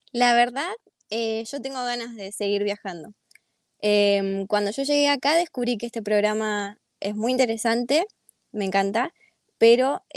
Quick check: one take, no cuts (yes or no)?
yes